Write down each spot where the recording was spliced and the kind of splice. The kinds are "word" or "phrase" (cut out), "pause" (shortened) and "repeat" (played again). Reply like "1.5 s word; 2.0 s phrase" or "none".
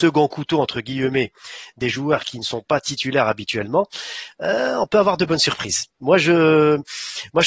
none

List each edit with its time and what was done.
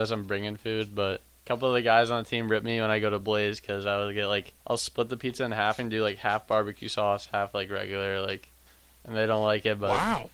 4.6 s pause; 8.7 s pause

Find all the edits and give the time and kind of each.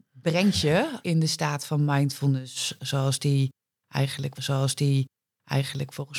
1.0 s word; 4.3 s repeat

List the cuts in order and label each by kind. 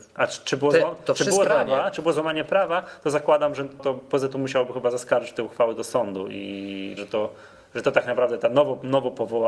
1.4 s word; 3.8 s word; 7.0 s word

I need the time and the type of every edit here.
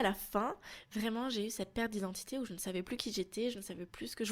none

